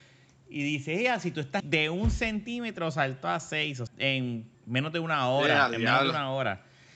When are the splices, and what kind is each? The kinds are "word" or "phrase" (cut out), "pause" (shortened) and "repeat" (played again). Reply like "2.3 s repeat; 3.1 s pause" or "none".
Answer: 1.6 s phrase; 3.9 s word; 4.5 s pause

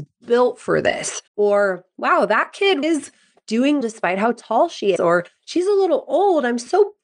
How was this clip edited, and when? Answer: 1.3 s pause; 2.8 s word; 3.8 s word; 5.0 s word

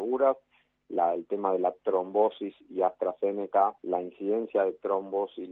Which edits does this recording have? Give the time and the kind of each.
3.8 s pause

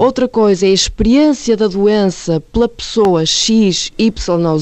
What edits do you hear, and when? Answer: none

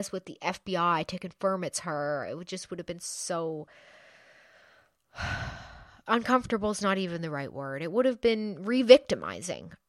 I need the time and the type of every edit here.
none

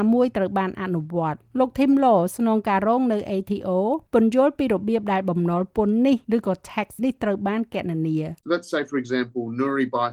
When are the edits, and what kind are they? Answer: 1.4 s pause; 4.1 s pause; 6.2 s pause; 7.0 s word; 8.4 s pause

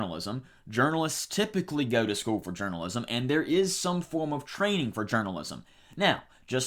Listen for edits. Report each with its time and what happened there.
none

